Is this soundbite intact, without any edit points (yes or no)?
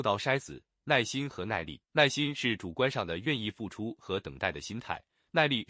no